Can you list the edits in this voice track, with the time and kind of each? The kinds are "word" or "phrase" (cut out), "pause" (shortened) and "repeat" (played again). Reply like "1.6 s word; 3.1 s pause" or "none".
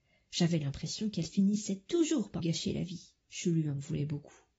2.4 s word; 3.2 s pause